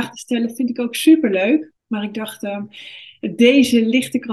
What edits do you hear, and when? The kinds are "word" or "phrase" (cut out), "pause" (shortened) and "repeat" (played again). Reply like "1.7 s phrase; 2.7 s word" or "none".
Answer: 1.8 s pause